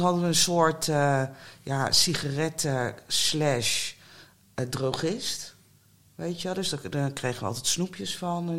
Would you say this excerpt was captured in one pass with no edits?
yes; 0 cuts

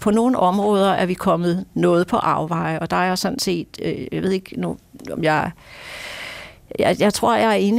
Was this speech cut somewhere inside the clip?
no; 0 cuts

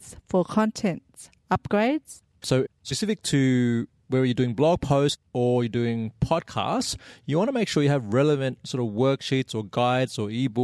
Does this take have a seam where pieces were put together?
no; 0 cuts

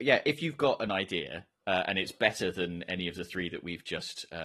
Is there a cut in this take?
no; 0 cuts

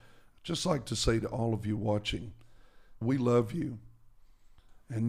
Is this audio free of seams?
no; 1 cut; at 3.0 s

